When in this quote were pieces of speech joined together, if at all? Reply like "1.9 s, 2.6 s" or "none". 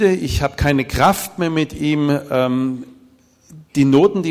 none